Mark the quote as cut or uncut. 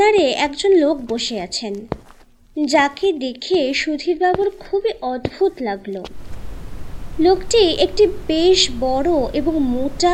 uncut